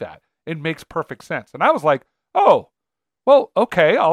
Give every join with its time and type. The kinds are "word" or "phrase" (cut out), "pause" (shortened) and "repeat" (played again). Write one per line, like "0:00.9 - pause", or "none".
none